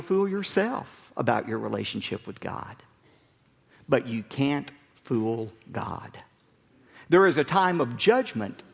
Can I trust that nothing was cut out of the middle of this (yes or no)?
yes